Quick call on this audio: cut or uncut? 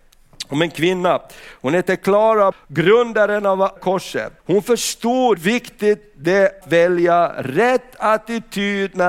cut